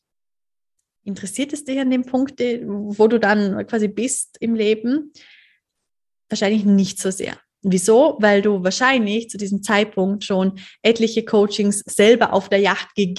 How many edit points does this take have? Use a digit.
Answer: 0